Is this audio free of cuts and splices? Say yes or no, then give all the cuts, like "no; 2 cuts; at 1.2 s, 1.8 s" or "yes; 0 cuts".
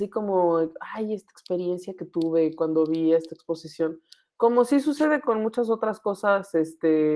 yes; 0 cuts